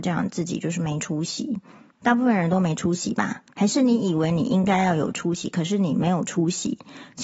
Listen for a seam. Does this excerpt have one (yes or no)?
yes